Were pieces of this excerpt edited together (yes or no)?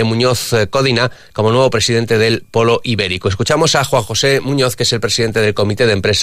no